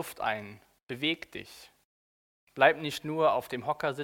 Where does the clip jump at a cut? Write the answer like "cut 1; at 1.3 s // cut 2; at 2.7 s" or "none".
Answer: none